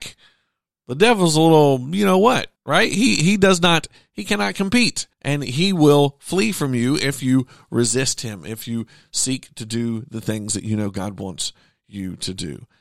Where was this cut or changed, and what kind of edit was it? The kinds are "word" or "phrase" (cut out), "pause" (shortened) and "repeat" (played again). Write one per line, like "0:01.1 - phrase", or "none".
0:02.6 - pause
0:05.1 - pause